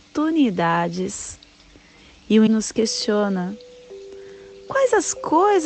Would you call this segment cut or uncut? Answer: cut